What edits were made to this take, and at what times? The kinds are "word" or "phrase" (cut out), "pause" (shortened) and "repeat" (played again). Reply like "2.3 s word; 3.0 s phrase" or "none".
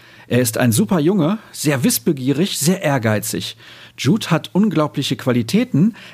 none